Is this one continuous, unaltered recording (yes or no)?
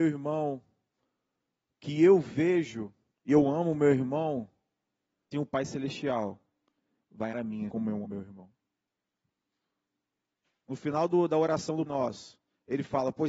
no